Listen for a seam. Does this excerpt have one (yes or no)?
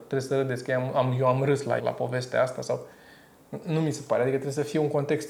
yes